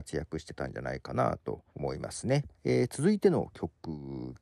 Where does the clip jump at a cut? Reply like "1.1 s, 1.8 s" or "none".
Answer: 1.7 s, 2.6 s